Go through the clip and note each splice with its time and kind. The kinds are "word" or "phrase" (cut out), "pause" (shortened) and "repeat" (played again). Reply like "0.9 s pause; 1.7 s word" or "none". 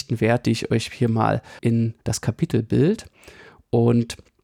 1.6 s word; 2.0 s pause